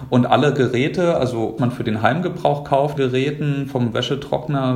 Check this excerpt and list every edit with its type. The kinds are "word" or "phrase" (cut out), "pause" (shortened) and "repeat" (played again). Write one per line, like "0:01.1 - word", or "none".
0:01.6 - phrase
0:03.0 - phrase